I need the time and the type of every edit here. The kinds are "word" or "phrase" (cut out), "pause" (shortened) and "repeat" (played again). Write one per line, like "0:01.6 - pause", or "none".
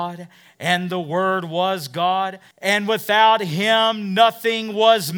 0:02.5 - pause